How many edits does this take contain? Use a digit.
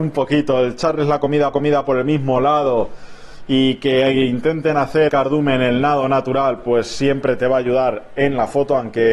2